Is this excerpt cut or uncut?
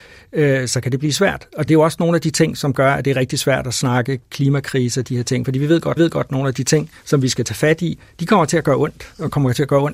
cut